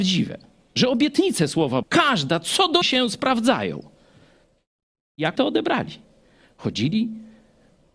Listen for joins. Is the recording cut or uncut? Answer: cut